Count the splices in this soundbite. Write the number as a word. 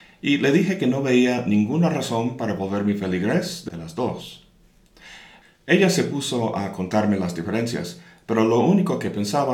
one